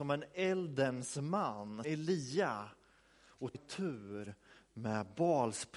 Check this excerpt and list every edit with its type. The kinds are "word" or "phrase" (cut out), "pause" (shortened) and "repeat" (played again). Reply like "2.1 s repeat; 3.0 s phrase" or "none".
1.8 s word; 3.5 s word